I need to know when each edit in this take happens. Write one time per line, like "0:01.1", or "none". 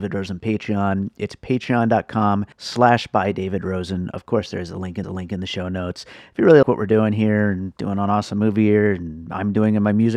0:02.5
0:05.0
0:06.6